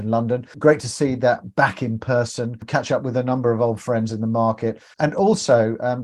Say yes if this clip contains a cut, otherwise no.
no